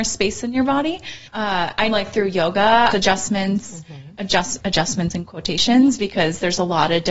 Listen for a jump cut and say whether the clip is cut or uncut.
cut